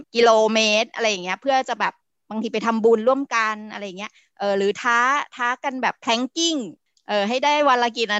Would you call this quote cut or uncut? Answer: uncut